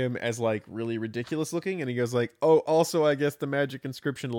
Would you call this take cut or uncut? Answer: uncut